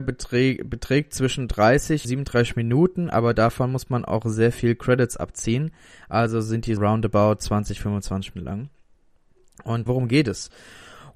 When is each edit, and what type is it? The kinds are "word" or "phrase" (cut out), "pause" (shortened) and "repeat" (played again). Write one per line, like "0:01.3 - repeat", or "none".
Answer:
0:02.0 - word
0:06.8 - word
0:08.3 - word
0:09.9 - word